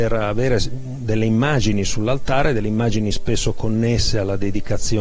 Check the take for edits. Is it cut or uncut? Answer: uncut